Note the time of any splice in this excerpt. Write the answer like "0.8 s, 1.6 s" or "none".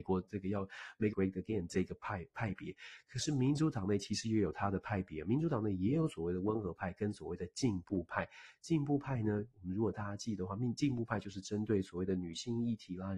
1.1 s